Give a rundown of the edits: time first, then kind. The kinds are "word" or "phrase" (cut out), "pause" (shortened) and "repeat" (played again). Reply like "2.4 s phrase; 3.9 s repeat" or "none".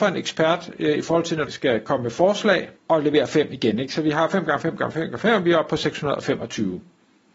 1.5 s word; 2.8 s pause